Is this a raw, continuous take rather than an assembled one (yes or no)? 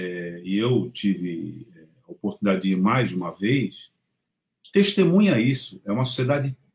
yes